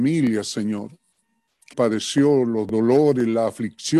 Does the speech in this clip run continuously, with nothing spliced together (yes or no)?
no